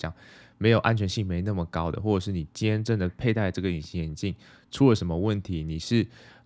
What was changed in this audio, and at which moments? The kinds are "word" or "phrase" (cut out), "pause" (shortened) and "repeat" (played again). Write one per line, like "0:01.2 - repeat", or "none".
none